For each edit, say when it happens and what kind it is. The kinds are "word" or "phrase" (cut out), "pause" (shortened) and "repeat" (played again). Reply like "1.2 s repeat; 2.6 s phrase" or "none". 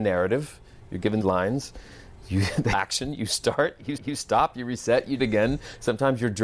1.2 s word; 2.7 s word; 4.0 s repeat; 5.2 s phrase